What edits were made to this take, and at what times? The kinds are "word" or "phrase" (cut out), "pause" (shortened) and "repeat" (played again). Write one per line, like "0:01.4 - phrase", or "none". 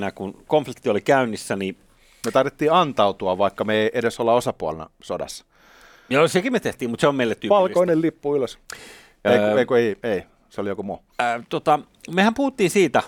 none